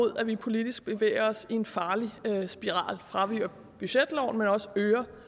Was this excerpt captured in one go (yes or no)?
yes